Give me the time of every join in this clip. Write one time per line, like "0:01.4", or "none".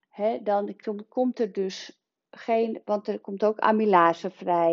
none